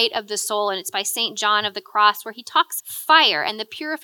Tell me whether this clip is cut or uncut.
cut